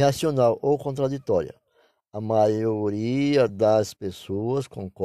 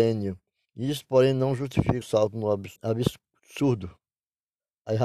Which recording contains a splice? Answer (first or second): second